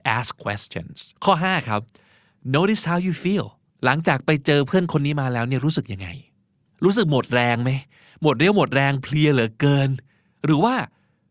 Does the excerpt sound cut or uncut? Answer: cut